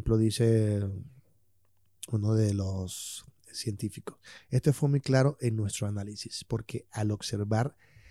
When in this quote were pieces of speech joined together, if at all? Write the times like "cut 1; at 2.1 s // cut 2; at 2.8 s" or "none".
none